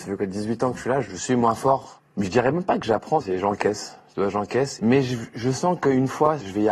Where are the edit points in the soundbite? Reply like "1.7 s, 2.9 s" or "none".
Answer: none